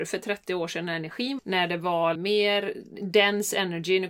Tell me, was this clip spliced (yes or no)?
yes